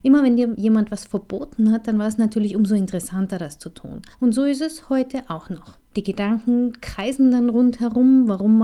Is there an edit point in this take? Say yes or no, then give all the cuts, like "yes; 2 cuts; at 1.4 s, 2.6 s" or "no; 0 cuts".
yes; 2 cuts; at 4.1 s, 5.9 s